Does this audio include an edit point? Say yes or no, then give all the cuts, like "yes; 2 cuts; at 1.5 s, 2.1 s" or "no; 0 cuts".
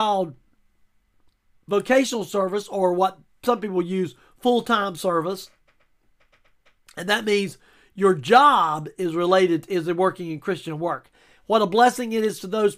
no; 0 cuts